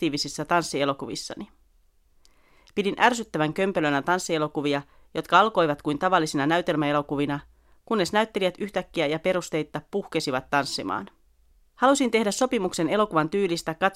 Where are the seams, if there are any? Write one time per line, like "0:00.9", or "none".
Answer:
none